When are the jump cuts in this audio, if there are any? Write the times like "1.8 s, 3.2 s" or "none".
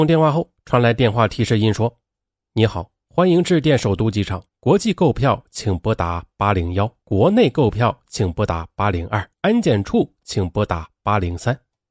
4.5 s, 7.0 s, 9.3 s